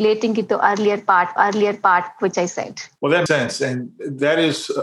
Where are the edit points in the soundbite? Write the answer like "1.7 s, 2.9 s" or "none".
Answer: 1.4 s, 3.0 s, 3.3 s